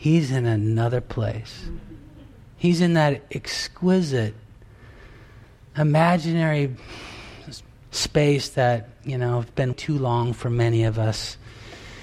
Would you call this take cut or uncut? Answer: cut